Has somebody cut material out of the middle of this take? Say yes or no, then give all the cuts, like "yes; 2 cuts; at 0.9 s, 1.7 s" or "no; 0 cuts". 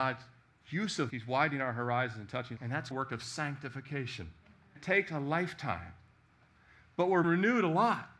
yes; 5 cuts; at 1.1 s, 2.6 s, 2.9 s, 4.8 s, 7.2 s